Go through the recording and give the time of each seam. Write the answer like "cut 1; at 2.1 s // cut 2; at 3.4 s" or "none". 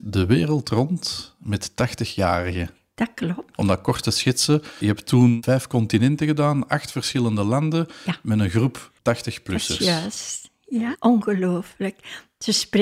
cut 1; at 9.0 s